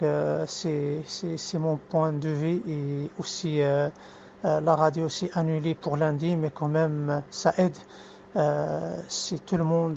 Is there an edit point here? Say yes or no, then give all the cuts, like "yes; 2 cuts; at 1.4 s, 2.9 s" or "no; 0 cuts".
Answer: no; 0 cuts